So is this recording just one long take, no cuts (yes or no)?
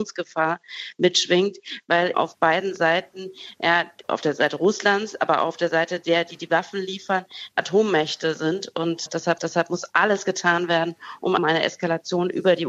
no